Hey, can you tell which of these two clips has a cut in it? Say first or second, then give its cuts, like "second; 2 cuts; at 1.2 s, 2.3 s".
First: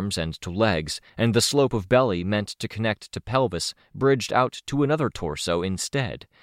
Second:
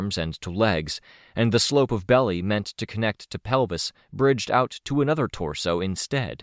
first; 1 cut; at 1.1 s